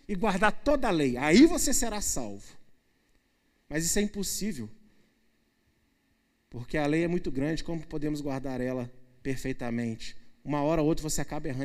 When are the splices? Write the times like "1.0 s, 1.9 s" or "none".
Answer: none